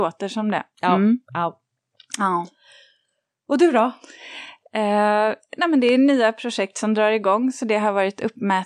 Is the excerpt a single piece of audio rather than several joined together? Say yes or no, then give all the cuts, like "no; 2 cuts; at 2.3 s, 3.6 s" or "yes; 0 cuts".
yes; 0 cuts